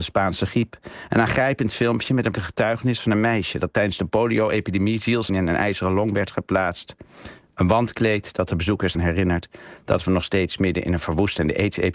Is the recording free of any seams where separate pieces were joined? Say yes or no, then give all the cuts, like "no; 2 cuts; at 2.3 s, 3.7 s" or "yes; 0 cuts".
no; 3 cuts; at 2.3 s, 5.3 s, 8.9 s